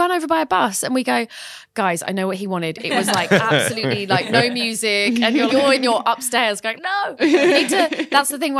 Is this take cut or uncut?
cut